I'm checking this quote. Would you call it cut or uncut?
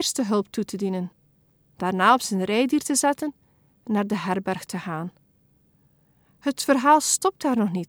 uncut